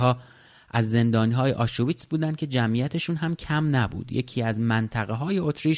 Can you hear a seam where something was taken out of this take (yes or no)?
no